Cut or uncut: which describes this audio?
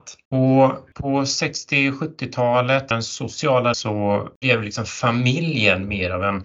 cut